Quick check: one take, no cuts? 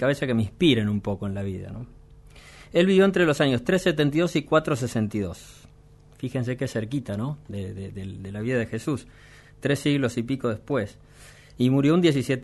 yes; 0 cuts

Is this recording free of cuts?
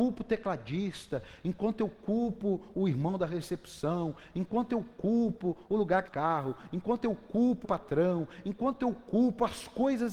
no; 2 cuts; at 6.1 s, 7.6 s

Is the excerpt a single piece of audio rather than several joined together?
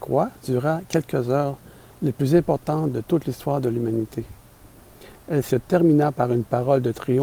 yes; 0 cuts

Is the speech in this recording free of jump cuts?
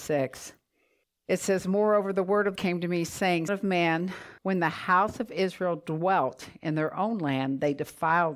no; 4 cuts; at 1.0 s, 2.6 s, 3.5 s, 4.4 s

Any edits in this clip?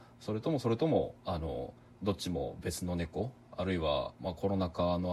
no; 0 cuts

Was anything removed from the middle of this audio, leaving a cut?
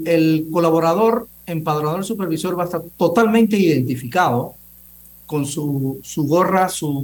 no; 0 cuts

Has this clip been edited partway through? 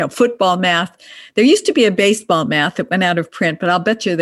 no; 0 cuts

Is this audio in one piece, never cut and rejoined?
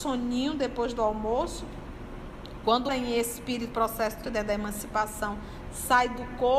no; 3 cuts; at 2.9 s, 3.7 s, 4.2 s

